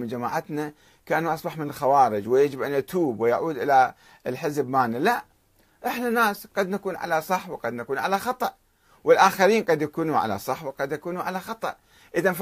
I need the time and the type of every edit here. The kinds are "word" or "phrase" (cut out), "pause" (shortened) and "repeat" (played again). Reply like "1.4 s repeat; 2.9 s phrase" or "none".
none

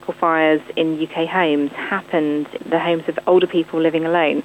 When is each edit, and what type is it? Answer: 2.6 s word

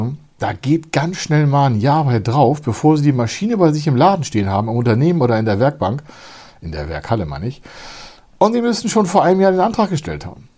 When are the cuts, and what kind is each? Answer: none

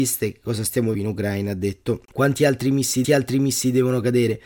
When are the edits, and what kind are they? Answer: 0.9 s phrase; 3.0 s repeat

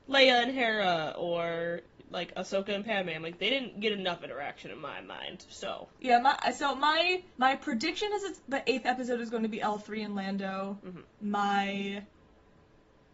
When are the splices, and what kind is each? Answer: 5.9 s pause; 7.3 s pause

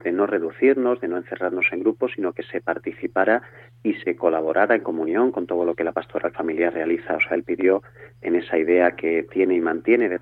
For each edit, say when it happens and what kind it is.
none

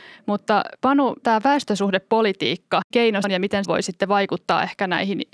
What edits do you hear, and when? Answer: 1.2 s word; 2.9 s word; 3.2 s word; 3.6 s phrase

